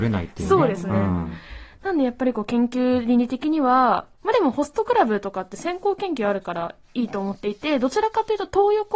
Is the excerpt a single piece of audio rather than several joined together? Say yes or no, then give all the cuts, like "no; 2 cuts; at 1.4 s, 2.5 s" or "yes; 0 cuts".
no; 2 cuts; at 4.1 s, 6.8 s